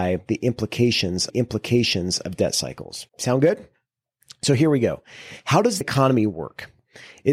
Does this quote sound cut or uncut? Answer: cut